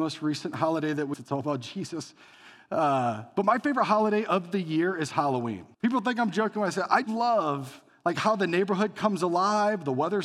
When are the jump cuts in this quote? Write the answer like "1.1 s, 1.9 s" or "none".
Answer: 1.1 s, 5.7 s, 7.0 s